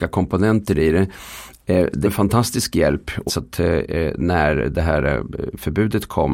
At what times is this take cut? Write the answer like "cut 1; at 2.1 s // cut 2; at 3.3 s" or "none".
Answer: cut 1; at 2.0 s // cut 2; at 3.3 s